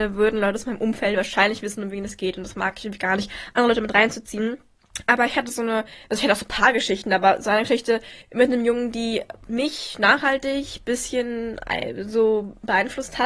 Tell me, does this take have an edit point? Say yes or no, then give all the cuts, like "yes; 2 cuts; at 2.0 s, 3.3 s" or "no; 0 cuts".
yes; 3 cuts; at 6.0 s, 8.2 s, 9.4 s